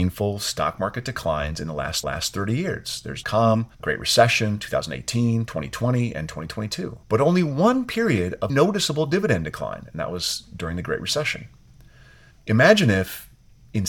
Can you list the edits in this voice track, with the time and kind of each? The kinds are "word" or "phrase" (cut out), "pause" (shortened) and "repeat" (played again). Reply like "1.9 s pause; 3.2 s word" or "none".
2.0 s repeat; 3.2 s word; 3.7 s pause; 7.0 s pause; 8.5 s word